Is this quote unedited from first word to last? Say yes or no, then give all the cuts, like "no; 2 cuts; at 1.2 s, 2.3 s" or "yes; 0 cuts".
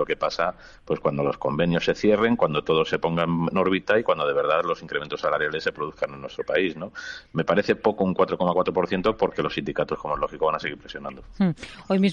yes; 0 cuts